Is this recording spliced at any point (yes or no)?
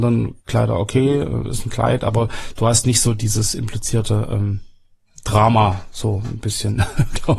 no